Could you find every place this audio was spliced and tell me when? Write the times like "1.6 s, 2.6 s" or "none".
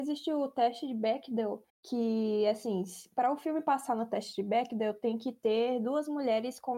1.7 s